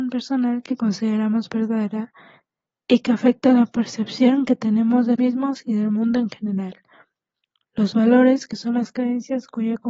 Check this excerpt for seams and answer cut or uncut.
cut